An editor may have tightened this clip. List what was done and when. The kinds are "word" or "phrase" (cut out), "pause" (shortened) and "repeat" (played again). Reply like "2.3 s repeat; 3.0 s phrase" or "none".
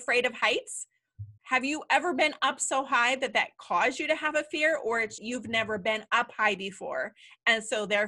1.4 s pause; 5.2 s phrase